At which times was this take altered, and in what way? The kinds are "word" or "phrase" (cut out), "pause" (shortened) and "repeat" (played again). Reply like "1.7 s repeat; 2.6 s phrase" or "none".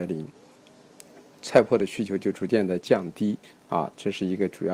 3.4 s pause